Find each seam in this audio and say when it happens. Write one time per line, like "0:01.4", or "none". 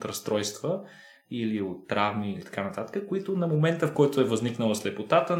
none